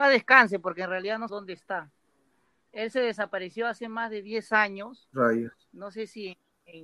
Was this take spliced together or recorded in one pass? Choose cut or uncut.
cut